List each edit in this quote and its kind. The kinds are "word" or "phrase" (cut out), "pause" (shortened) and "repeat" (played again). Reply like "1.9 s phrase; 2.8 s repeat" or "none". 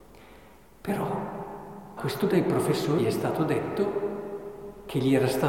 2.0 s word; 2.3 s word; 3.0 s word